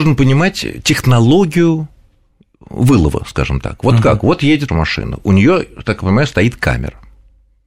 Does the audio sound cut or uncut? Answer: cut